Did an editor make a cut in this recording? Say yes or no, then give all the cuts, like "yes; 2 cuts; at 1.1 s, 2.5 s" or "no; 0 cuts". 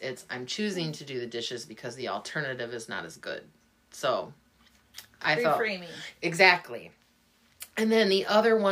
no; 0 cuts